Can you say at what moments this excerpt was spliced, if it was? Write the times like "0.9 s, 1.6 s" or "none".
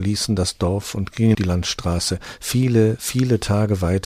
1.3 s